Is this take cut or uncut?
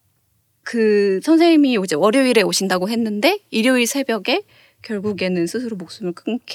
uncut